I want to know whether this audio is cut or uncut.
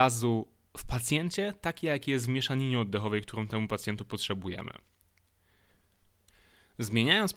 uncut